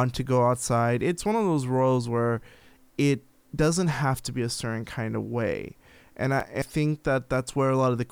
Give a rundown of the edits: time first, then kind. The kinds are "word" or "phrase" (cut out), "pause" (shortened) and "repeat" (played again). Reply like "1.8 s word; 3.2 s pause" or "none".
6.6 s word